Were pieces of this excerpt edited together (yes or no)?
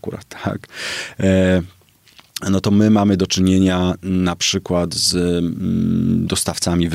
no